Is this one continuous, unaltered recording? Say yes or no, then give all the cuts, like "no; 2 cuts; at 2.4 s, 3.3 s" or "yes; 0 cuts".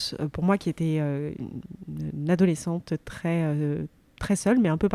yes; 0 cuts